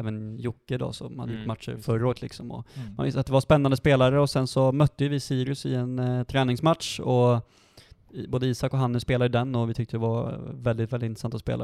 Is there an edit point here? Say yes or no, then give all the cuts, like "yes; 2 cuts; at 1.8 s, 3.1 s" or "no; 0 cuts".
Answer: no; 0 cuts